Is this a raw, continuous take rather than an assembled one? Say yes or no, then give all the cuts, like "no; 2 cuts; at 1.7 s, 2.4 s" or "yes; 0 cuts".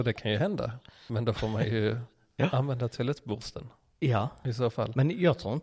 yes; 0 cuts